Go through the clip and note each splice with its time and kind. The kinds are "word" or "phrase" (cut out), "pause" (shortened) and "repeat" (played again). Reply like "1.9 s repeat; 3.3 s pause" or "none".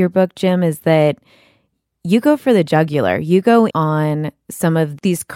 3.7 s word